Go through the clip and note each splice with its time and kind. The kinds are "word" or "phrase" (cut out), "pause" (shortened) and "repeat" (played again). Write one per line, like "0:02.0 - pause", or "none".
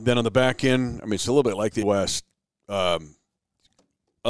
0:01.8 - word